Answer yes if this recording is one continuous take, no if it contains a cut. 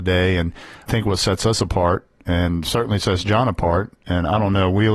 yes